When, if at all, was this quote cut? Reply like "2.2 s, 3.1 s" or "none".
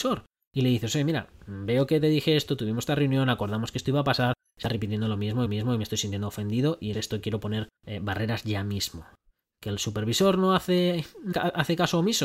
5.5 s, 6.9 s, 7.8 s, 9.3 s, 11.3 s

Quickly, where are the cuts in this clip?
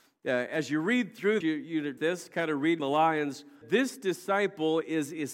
1.4 s, 2.0 s, 2.8 s, 3.6 s

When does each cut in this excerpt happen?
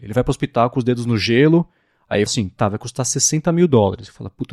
2.3 s

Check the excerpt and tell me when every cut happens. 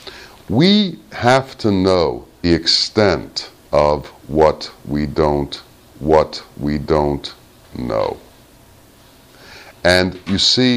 2.4 s, 3.6 s, 5.9 s

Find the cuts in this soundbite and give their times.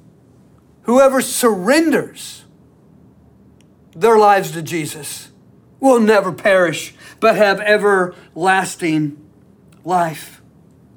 none

